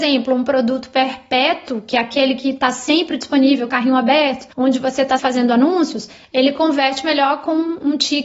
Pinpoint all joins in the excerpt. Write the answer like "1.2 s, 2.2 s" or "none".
3.7 s, 4.5 s, 5.2 s